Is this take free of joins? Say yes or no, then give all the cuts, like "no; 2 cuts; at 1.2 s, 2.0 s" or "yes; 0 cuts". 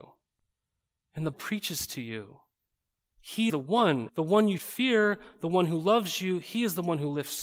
no; 4 cuts; at 1.3 s, 3.5 s, 4.1 s, 4.6 s